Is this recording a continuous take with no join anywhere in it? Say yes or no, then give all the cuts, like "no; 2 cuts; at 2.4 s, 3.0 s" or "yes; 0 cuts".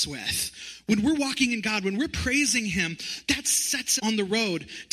no; 1 cut; at 4.0 s